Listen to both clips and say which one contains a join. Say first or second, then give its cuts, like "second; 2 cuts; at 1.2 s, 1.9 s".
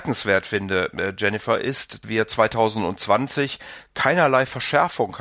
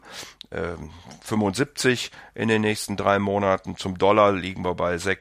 first; 1 cut; at 2.0 s